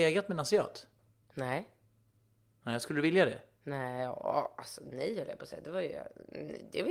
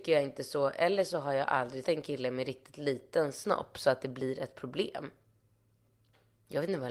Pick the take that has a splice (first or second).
second